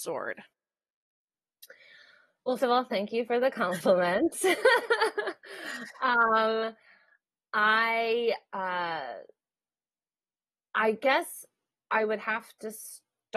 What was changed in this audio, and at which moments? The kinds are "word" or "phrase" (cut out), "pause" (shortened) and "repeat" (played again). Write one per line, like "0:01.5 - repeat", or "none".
0:02.6 - word